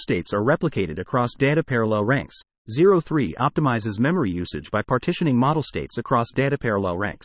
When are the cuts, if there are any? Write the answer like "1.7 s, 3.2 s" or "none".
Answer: none